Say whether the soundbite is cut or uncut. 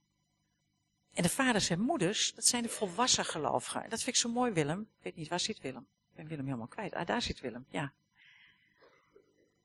uncut